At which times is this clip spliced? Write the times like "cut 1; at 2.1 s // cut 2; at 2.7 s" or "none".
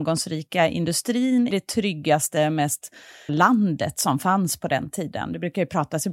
cut 1; at 1.5 s // cut 2; at 3.3 s